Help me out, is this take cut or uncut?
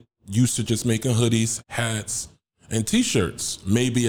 uncut